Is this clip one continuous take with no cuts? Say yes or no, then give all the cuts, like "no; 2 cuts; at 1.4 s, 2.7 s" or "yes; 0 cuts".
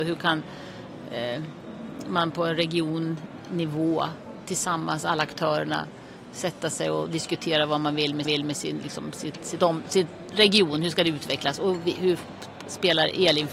no; 1 cut; at 8.2 s